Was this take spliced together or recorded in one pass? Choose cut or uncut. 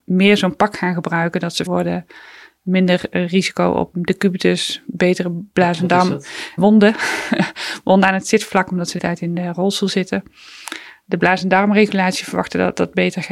cut